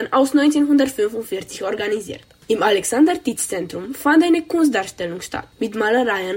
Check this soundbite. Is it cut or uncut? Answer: uncut